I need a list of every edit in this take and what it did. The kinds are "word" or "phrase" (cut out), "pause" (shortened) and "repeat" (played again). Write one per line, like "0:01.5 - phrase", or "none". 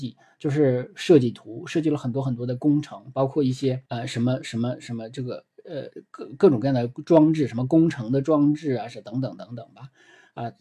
0:03.9 - pause